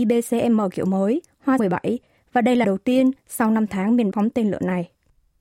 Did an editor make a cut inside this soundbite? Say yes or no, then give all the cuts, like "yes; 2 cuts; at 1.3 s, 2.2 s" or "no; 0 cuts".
yes; 3 cuts; at 1.6 s, 2.6 s, 4.1 s